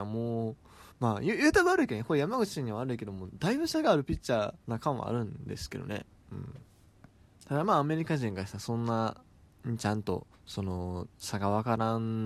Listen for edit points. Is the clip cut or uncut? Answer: cut